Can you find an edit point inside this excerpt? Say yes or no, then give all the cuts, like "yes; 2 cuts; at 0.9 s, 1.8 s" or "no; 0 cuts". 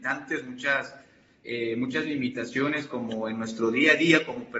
no; 0 cuts